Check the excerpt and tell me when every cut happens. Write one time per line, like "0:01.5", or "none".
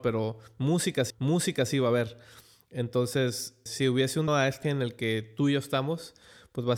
0:01.1
0:03.7
0:04.3
0:04.6